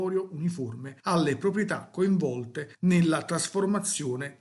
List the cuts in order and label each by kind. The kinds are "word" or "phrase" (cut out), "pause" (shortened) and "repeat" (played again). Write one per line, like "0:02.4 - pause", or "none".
0:01.0 - pause
0:02.7 - pause